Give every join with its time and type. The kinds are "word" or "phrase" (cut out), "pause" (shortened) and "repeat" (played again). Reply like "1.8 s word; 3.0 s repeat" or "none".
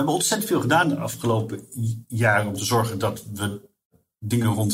none

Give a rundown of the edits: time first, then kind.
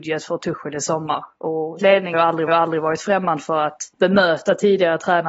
1.8 s word; 2.1 s word; 2.5 s repeat; 3.9 s pause

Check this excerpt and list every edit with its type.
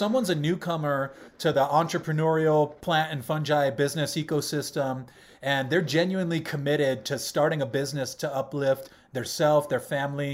none

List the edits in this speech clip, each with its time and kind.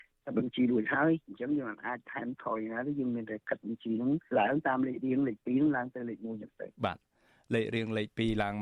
4.3 s pause; 6.7 s pause

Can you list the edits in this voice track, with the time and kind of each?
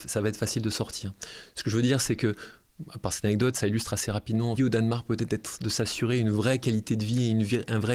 4.6 s phrase

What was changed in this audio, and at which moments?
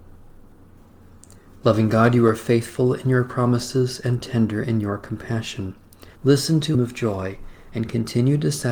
6.1 s pause; 6.7 s phrase

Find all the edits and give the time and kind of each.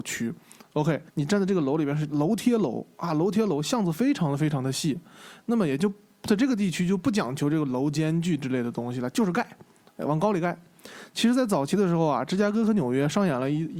1.1 s pause

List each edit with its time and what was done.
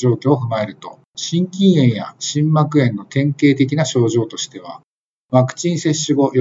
none

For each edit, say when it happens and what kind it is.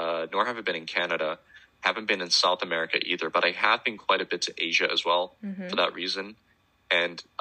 none

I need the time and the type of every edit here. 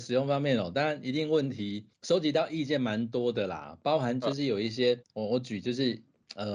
1.9 s pause; 5.1 s pause

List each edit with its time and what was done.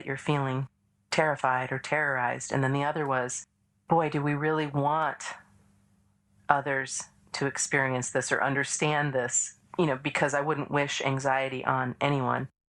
none

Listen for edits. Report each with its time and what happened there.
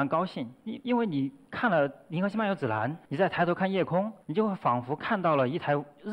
3.0 s pause; 4.2 s pause

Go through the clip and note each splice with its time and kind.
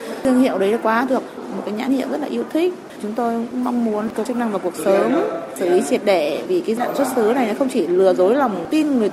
1.1 s word; 4.3 s word; 6.5 s word; 6.8 s word

